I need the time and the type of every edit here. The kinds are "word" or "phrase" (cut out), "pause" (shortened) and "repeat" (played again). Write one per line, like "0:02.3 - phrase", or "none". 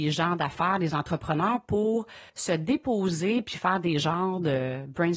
0:02.3 - pause